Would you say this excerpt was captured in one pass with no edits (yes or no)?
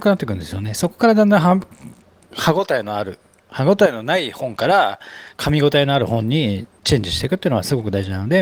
yes